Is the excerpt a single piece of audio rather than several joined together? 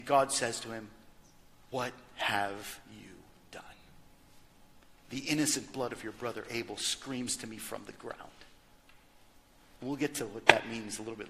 yes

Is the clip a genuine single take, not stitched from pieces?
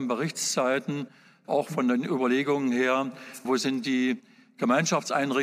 yes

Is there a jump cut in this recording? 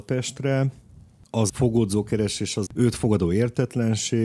yes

